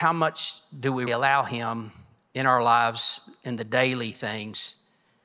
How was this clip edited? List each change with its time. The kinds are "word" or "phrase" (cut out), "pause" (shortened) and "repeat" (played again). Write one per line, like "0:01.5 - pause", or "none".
0:01.1 - word